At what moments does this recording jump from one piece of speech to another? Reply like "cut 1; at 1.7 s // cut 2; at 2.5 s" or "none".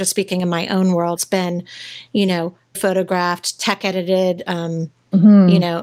cut 1; at 1.2 s // cut 2; at 2.7 s

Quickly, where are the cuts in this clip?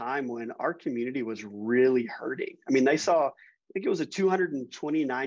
none

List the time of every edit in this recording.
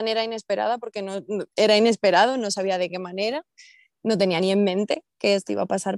none

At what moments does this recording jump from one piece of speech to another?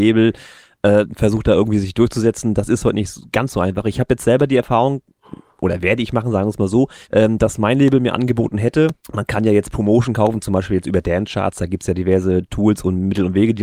cut 1; at 5.5 s // cut 2; at 7.0 s // cut 3; at 9.0 s

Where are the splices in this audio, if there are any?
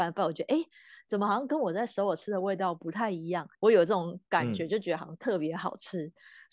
cut 1; at 3.5 s

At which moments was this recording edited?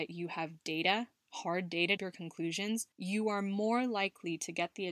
cut 1; at 2.0 s // cut 2; at 2.9 s

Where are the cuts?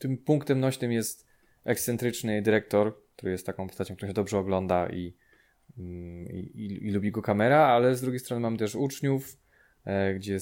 none

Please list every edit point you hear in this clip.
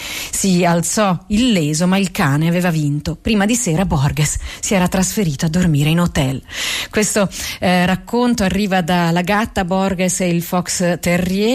none

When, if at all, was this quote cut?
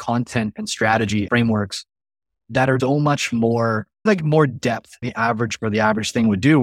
cut 1; at 1.3 s // cut 2; at 2.8 s // cut 3; at 4.1 s // cut 4; at 5.0 s // cut 5; at 5.6 s

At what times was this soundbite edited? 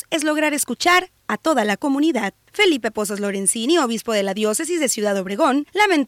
none

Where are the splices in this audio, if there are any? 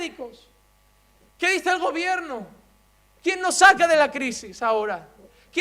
none

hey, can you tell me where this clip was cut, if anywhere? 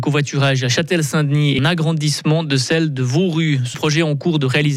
cut 1; at 1.6 s // cut 2; at 3.7 s

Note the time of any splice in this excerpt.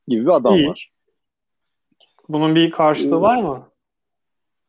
none

